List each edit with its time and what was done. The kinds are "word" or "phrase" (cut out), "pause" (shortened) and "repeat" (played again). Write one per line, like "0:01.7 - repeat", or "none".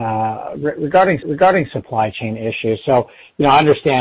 0:01.2 - repeat